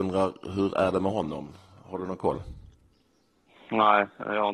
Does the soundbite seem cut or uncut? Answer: uncut